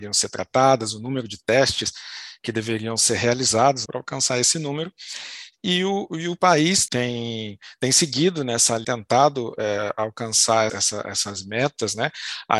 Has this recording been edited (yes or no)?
yes